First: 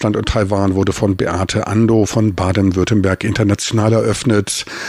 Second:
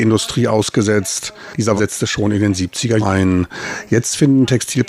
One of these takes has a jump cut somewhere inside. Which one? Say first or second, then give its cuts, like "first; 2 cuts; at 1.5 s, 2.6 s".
second; 2 cuts; at 1.8 s, 3.0 s